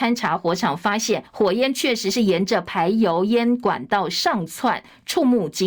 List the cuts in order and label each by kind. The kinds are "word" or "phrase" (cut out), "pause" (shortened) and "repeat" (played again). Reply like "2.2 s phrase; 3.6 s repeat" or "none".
1.3 s pause